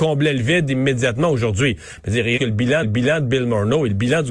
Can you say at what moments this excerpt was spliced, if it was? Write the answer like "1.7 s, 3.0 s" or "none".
2.4 s, 2.8 s